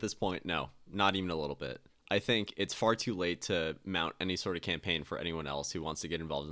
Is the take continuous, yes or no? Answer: yes